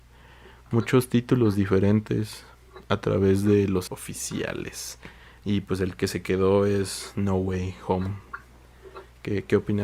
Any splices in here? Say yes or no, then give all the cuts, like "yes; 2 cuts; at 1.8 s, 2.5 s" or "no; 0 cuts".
yes; 1 cut; at 3.9 s